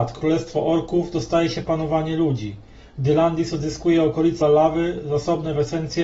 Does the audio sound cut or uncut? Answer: cut